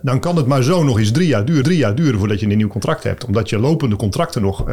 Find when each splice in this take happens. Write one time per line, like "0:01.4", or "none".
0:01.6